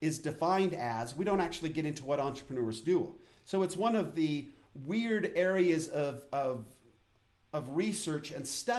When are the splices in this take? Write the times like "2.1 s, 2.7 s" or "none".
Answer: none